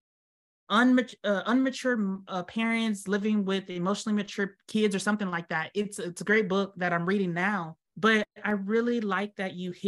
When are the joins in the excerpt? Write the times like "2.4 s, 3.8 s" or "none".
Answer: 7.9 s